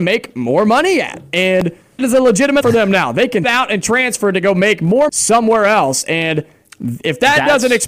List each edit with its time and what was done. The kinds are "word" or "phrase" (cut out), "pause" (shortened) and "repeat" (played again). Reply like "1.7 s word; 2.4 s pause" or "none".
2.0 s word; 2.6 s word; 3.4 s word; 5.1 s word